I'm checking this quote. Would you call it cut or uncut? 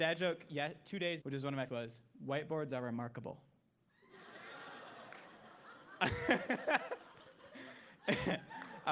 cut